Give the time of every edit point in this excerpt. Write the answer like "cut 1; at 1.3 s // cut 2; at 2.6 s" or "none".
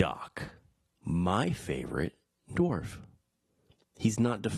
none